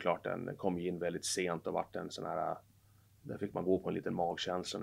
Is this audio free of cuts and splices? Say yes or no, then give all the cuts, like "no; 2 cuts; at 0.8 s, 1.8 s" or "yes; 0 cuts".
yes; 0 cuts